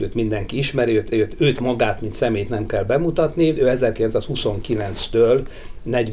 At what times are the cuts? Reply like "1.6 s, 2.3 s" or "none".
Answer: 1.1 s

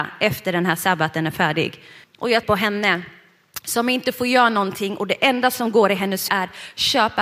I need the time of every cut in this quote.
2.0 s, 2.4 s, 6.3 s

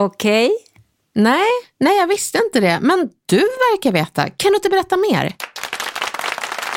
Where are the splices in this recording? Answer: none

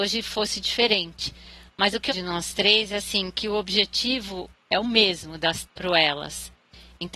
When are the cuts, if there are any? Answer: 2.1 s, 4.6 s, 5.6 s

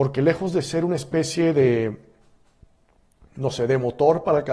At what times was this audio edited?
none

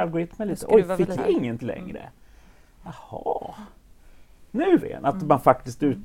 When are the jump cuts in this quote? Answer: 1.2 s, 1.6 s, 4.8 s

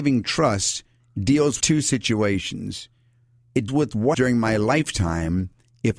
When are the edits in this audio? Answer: 1.0 s, 1.6 s, 3.7 s, 4.1 s

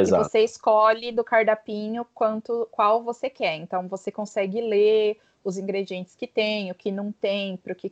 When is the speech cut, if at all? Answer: none

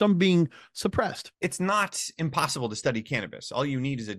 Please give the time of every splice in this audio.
1.3 s

